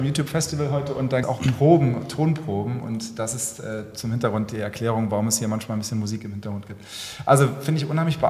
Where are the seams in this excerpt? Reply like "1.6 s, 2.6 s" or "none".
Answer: 1.2 s